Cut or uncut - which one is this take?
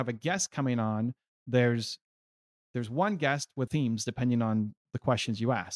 cut